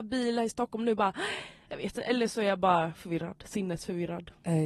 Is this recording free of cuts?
yes; 0 cuts

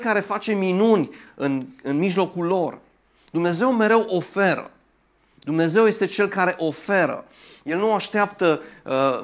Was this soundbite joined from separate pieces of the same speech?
no; 0 cuts

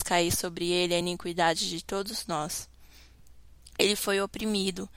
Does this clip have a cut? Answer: no; 0 cuts

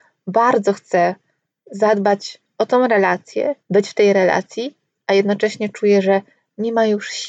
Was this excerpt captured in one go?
no; 1 cut; at 3.6 s

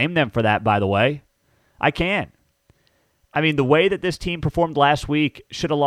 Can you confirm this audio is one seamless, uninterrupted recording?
yes; 0 cuts

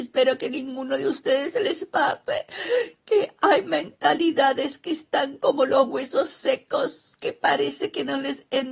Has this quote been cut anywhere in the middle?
no; 0 cuts

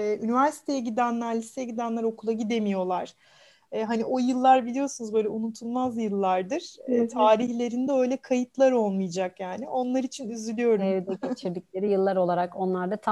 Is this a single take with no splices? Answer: yes; 0 cuts

